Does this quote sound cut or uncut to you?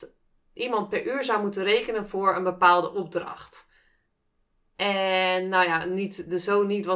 uncut